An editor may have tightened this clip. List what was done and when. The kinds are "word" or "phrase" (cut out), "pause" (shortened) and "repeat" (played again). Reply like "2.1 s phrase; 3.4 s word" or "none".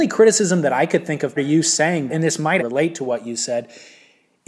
1.4 s word; 2.1 s word; 2.6 s word